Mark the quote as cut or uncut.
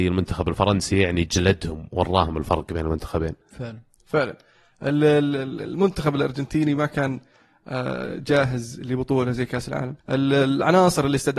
cut